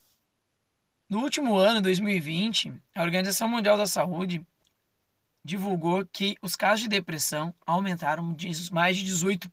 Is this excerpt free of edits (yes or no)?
yes